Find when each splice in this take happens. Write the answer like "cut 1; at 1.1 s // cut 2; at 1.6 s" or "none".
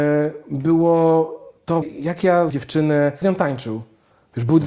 cut 1; at 1.8 s // cut 2; at 2.5 s // cut 3; at 3.2 s